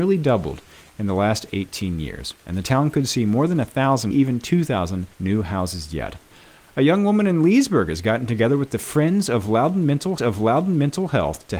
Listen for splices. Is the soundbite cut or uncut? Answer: cut